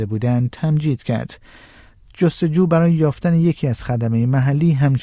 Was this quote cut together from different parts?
no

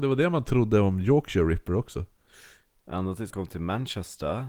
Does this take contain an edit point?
yes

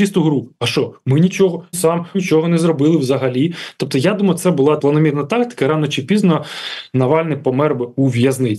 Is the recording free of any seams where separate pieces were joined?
no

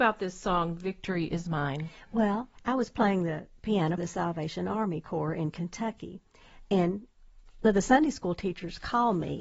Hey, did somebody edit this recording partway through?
yes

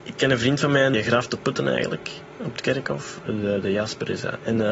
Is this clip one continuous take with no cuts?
yes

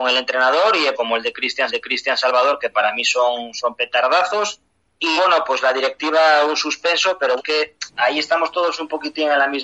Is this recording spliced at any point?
yes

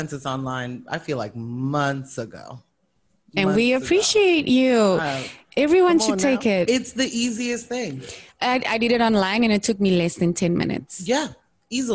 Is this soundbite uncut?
yes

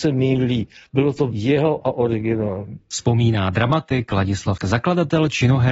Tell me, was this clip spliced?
yes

